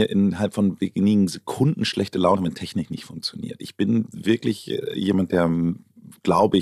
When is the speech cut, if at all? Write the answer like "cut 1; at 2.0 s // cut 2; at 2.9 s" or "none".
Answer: cut 1; at 2.4 s